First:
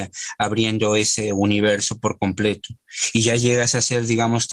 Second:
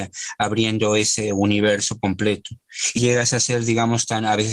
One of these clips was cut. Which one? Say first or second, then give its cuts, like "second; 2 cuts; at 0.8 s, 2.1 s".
second; 2 cuts; at 2.0 s, 3.0 s